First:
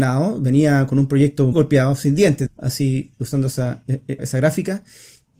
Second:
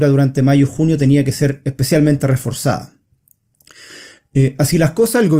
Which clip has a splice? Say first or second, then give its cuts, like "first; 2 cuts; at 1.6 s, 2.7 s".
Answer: first; 3 cuts; at 1.5 s, 2.5 s, 4.2 s